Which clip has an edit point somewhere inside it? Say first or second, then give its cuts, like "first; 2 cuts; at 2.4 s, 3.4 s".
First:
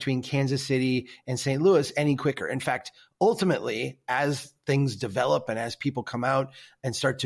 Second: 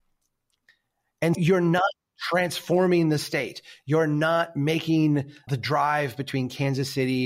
second; 2 cuts; at 1.3 s, 5.5 s